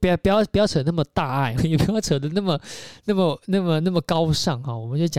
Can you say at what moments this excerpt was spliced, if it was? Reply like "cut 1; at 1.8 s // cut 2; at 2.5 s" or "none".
cut 1; at 1.6 s